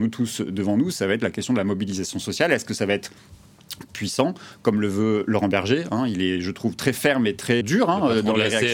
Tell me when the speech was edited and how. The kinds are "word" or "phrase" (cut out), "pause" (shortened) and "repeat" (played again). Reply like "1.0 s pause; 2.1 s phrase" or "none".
7.6 s word